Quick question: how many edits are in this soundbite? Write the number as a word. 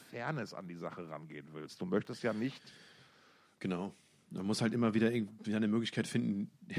zero